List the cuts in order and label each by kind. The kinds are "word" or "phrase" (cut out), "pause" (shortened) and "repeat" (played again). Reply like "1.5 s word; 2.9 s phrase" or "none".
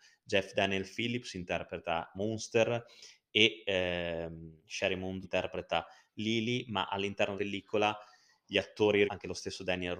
2.1 s word; 4.6 s pause; 5.2 s word; 7.4 s word; 9.1 s word